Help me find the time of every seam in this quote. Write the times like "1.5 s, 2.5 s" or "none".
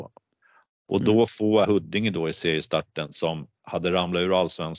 1.6 s